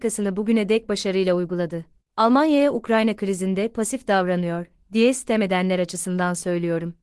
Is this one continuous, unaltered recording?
no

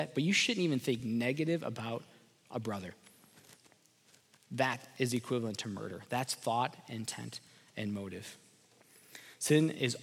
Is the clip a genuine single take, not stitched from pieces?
yes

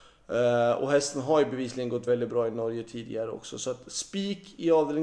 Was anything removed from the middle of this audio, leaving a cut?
yes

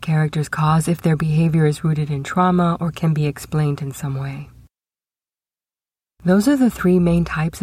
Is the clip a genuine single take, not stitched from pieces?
yes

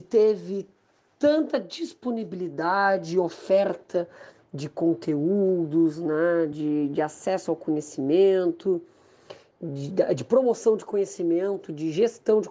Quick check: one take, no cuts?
yes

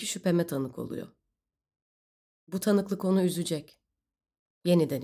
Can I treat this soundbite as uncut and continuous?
yes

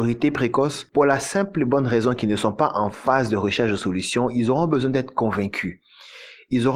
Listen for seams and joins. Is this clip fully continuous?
yes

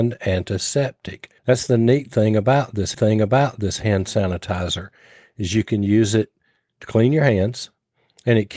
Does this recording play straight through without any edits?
no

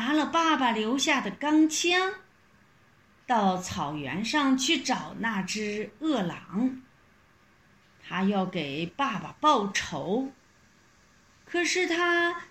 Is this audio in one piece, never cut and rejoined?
yes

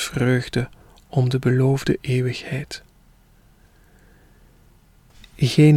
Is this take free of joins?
yes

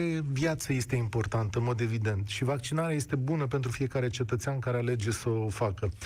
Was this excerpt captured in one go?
yes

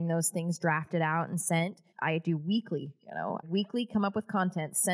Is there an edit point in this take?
yes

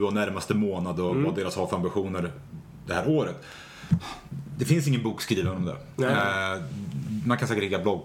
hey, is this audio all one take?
yes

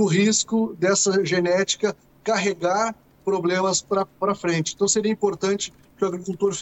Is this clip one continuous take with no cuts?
yes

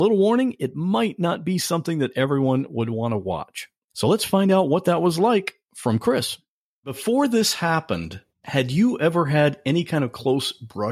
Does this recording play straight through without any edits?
no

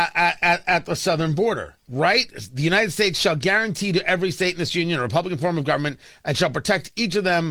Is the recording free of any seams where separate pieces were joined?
no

